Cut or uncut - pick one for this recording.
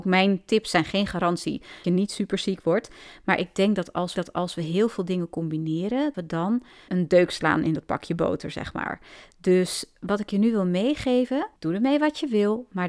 cut